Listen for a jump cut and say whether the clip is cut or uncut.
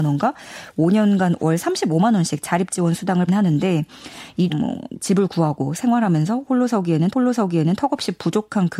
cut